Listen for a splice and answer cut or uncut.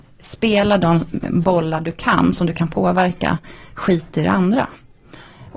uncut